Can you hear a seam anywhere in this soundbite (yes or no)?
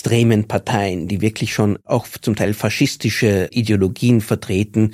no